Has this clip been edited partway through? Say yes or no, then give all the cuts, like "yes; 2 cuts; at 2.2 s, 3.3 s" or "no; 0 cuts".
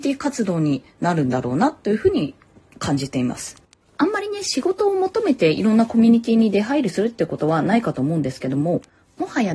no; 0 cuts